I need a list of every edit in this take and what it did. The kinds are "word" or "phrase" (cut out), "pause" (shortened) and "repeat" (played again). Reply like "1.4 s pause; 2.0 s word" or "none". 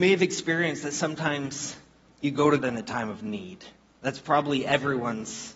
2.0 s pause; 2.6 s word